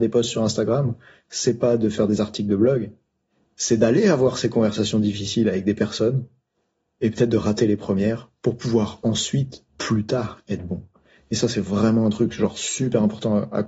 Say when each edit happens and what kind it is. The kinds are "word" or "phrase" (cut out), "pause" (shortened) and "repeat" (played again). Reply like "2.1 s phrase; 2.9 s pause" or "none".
none